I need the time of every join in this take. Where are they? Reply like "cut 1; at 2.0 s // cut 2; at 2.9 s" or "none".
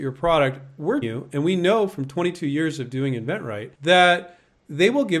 cut 1; at 1.0 s // cut 2; at 3.7 s

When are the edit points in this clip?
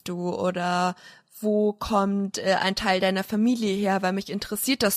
none

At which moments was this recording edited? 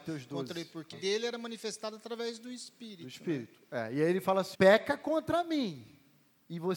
cut 1; at 0.9 s // cut 2; at 4.5 s

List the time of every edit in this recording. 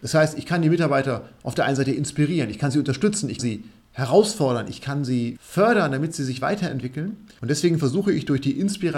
cut 1; at 3.4 s

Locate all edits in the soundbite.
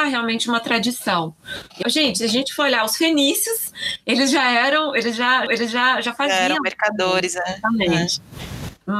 cut 1; at 1.8 s // cut 2; at 5.5 s

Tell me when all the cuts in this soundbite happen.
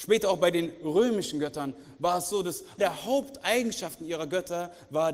cut 1; at 2.8 s

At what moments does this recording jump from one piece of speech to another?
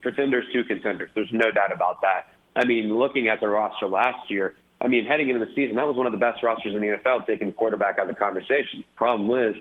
none

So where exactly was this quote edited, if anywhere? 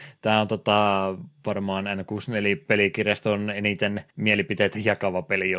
cut 1; at 4.1 s

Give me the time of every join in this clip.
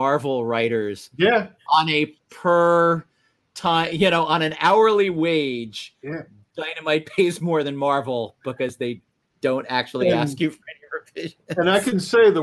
none

